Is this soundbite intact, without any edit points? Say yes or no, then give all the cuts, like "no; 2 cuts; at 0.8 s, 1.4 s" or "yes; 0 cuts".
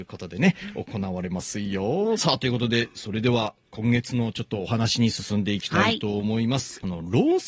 no; 1 cut; at 2.2 s